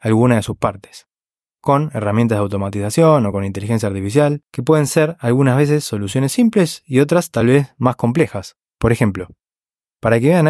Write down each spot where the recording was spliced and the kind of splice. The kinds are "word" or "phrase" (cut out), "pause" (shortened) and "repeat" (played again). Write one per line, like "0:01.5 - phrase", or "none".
none

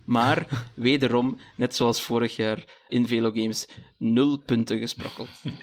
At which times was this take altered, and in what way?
0:02.9 - word

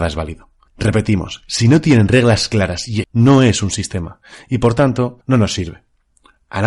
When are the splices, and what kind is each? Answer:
0:03.0 - word
0:05.2 - pause

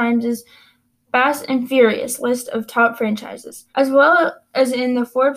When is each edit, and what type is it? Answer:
0:03.7 - pause

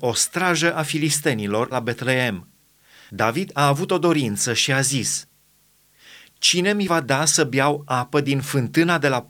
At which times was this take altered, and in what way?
0:01.7 - word

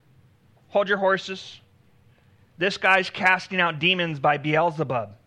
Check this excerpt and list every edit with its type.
none

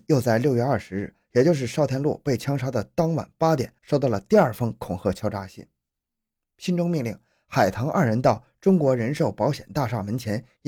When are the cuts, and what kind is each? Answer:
0:03.8 - pause

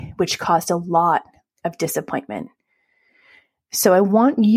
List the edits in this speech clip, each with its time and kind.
none

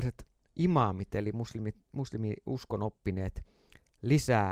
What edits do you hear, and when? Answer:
none

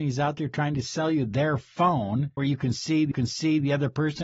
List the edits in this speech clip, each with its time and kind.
0:02.4 - word
0:03.1 - repeat

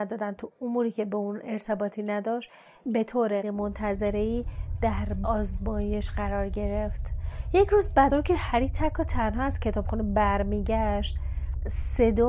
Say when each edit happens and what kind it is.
0:03.4 - word
0:05.2 - word
0:08.1 - word

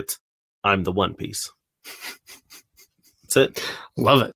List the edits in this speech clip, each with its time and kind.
0:03.3 - word

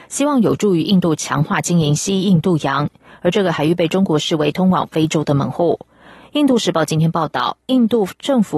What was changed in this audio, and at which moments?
none

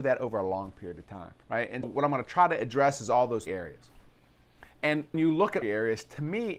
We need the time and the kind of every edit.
0:01.4 - pause
0:01.8 - word
0:03.5 - word
0:05.1 - word
0:05.6 - phrase

